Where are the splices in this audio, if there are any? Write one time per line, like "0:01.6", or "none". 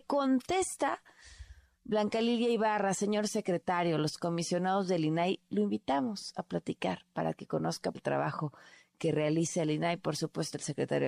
0:07.9